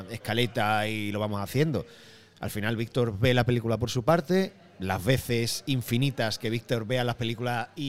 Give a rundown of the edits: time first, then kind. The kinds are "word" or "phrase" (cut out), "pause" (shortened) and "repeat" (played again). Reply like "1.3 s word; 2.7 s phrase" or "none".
none